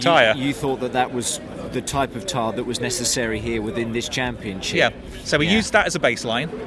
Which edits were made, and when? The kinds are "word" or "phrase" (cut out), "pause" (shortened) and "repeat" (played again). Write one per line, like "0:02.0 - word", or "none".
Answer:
none